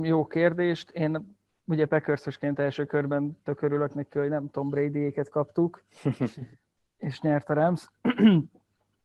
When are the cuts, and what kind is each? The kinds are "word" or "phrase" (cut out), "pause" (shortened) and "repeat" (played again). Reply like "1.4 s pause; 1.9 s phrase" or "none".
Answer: none

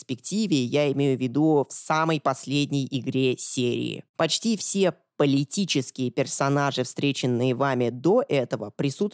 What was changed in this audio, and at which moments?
none

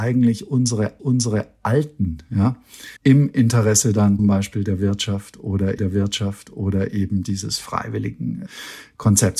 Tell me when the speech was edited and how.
1.0 s repeat; 3.0 s pause; 4.2 s word; 5.8 s repeat

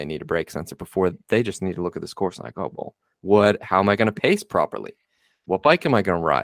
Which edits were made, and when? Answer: none

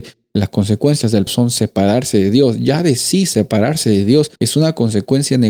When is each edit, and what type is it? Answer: 1.3 s word; 4.4 s pause

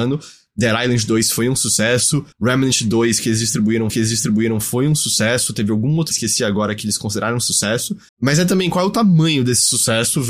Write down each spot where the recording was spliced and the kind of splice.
2.3 s pause; 3.9 s repeat; 6.1 s phrase; 8.1 s pause

